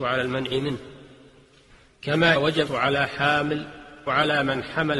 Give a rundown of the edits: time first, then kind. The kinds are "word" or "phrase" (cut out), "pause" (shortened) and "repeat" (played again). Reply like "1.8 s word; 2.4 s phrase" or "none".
2.4 s word; 2.7 s word; 4.1 s word